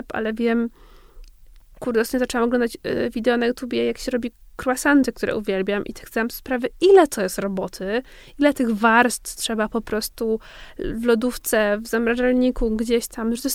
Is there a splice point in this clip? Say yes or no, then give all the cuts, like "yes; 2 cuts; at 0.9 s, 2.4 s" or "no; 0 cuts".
no; 0 cuts